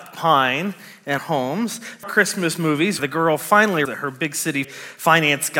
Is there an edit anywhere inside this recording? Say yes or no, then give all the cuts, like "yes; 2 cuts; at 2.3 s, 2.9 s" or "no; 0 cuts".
yes; 5 cuts; at 1.2 s, 2.0 s, 3.0 s, 3.8 s, 4.6 s